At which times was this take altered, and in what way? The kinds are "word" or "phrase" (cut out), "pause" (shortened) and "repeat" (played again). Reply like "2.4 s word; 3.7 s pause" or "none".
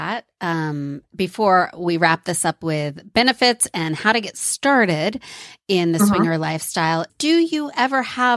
7.1 s word